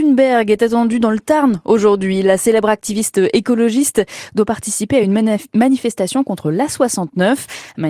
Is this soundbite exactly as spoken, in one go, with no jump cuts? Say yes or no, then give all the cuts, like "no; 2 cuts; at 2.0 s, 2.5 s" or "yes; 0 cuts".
yes; 0 cuts